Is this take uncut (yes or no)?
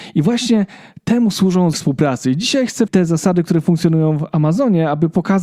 no